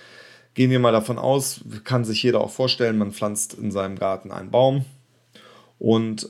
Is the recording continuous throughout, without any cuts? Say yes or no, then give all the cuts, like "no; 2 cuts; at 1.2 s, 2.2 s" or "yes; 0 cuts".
yes; 0 cuts